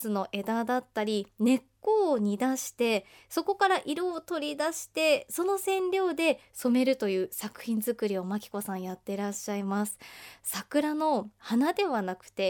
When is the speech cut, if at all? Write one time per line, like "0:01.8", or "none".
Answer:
none

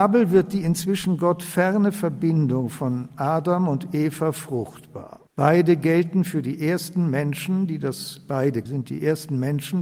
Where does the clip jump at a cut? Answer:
0:05.3
0:08.7

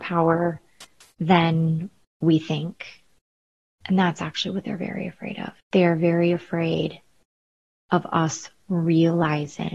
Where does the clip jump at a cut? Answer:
0:05.6

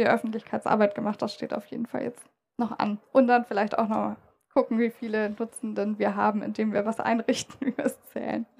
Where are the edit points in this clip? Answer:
none

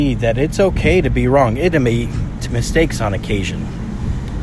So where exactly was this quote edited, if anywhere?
0:01.7
0:02.5

